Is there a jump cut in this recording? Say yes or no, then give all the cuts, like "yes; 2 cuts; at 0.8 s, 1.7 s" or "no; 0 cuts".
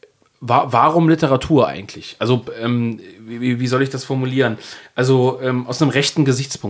no; 0 cuts